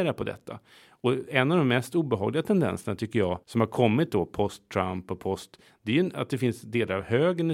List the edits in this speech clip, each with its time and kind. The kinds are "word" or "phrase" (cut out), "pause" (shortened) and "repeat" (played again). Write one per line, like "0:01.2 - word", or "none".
0:03.4 - pause